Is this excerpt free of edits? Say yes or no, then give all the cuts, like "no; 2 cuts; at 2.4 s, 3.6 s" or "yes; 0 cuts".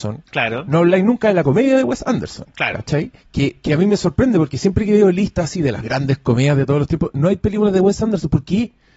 no; 1 cut; at 3.2 s